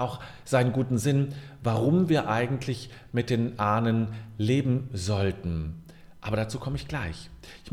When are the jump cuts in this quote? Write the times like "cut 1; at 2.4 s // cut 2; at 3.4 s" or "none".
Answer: none